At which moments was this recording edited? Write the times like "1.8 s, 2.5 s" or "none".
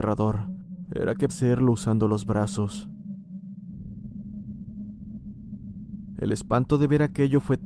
1.3 s